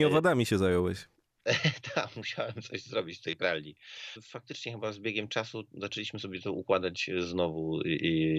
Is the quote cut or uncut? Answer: uncut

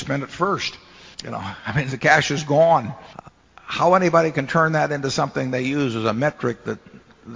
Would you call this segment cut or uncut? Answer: cut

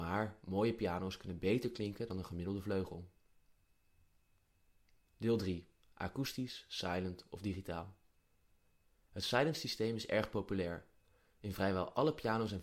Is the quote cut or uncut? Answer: uncut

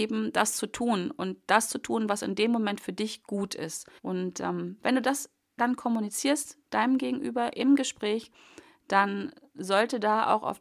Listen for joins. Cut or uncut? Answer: cut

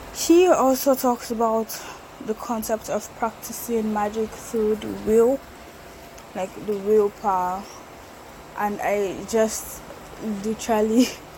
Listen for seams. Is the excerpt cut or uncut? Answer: uncut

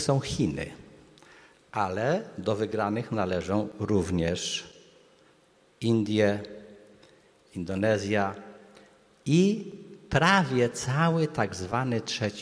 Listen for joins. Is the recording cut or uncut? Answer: uncut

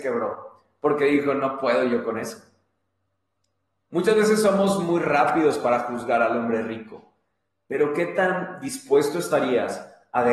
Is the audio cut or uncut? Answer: uncut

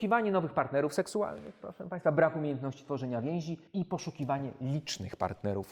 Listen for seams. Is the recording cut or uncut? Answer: cut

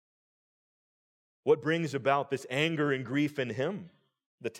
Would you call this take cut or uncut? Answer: uncut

